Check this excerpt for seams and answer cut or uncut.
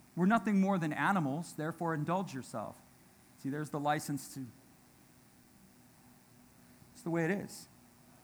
uncut